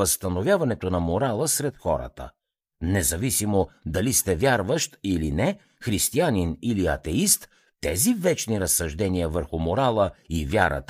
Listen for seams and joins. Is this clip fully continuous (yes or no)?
yes